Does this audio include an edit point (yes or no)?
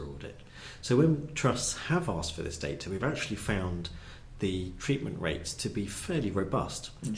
no